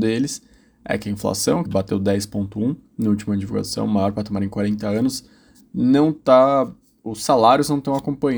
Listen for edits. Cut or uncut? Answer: cut